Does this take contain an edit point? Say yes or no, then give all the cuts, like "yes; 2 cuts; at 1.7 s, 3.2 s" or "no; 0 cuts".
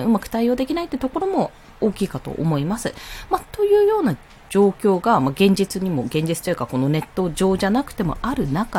no; 0 cuts